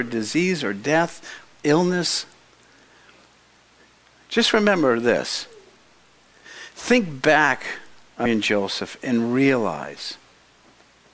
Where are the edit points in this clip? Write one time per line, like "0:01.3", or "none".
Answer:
0:08.3